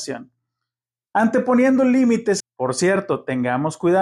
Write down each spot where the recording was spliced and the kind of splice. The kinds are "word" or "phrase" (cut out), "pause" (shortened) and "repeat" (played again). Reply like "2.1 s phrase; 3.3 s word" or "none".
2.4 s phrase